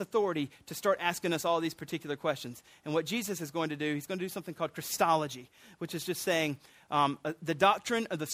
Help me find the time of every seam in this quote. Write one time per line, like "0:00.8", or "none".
none